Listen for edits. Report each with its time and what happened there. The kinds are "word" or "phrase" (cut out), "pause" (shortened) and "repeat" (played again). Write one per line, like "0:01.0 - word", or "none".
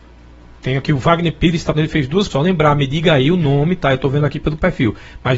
0:01.7 - word
0:02.3 - word